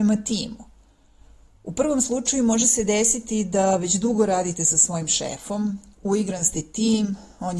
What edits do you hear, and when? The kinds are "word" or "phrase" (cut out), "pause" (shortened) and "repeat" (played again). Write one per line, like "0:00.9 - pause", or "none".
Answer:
none